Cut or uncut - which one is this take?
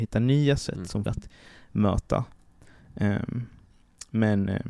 cut